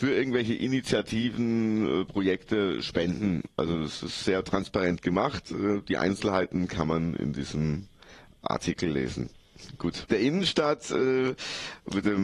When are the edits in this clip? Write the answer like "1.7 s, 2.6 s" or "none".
10.1 s

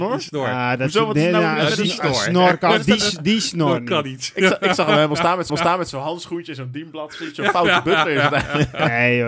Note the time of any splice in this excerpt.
5.5 s

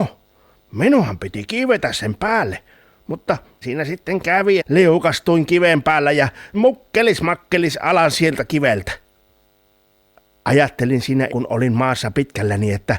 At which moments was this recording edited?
3.6 s, 4.6 s, 6.5 s, 11.3 s

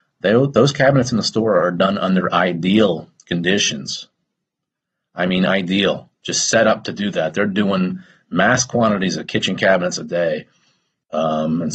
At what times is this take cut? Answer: none

